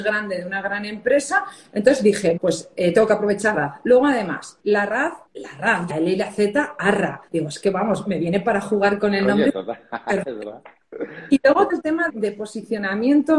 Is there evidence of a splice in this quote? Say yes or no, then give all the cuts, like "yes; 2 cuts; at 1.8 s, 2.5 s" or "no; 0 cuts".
yes; 8 cuts; at 2.4 s, 3.5 s, 4.6 s, 5.3 s, 5.9 s, 7.3 s, 11.7 s, 12.1 s